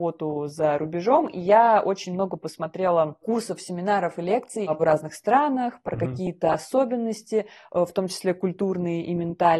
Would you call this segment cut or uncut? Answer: cut